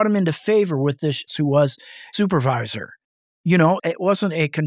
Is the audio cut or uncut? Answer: cut